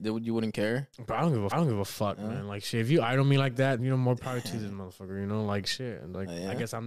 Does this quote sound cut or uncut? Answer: cut